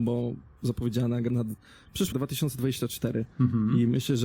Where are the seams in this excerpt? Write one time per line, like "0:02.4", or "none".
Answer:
0:01.3
0:02.1
0:03.3

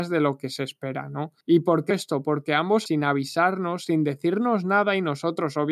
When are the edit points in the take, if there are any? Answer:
0:01.4
0:01.9
0:02.9

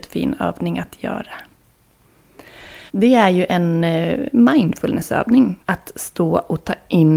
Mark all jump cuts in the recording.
0:02.9
0:05.6

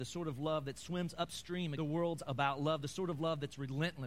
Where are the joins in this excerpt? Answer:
0:01.7
0:02.2

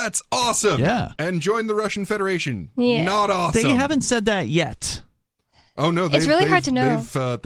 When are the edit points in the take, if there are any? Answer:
none

